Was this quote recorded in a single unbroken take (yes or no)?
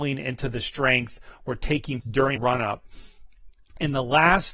no